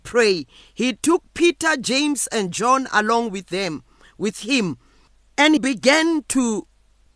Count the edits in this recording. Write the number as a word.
one